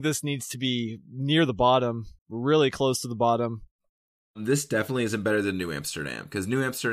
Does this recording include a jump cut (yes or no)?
yes